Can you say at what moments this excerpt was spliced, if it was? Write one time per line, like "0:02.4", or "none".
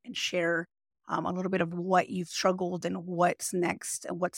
none